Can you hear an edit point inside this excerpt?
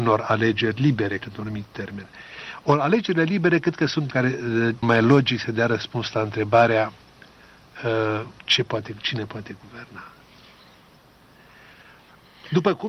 yes; 4 cuts; at 1.2 s, 4.1 s, 4.8 s, 8.4 s

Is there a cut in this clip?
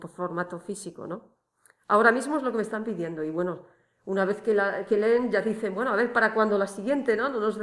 no; 0 cuts

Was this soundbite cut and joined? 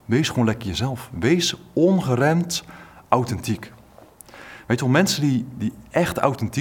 no; 0 cuts

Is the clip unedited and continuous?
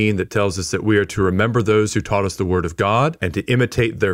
yes; 0 cuts

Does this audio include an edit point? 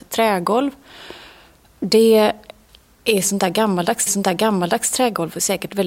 yes; 2 cuts; at 1.7 s, 4.1 s

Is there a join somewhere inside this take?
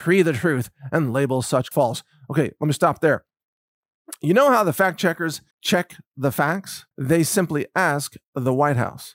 yes; 3 cuts; at 1.7 s, 5.5 s, 6.9 s

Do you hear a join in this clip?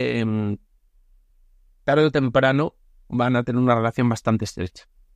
no; 0 cuts

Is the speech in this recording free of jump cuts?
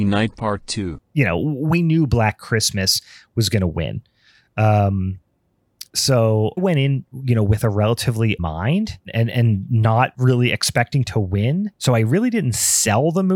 no; 3 cuts; at 6.6 s, 8.4 s, 11.8 s

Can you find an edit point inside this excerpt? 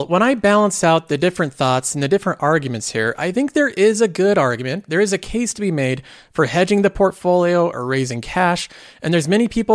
no; 0 cuts

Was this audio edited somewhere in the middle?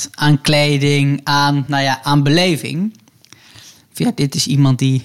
no; 0 cuts

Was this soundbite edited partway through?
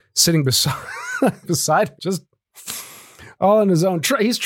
yes; 2 cuts; at 1.4 s, 2.0 s

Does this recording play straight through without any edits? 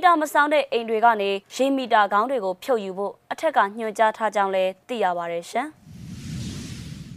no; 1 cut; at 1.4 s

